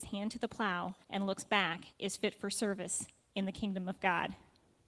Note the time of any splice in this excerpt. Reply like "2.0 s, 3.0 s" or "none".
1.0 s, 1.9 s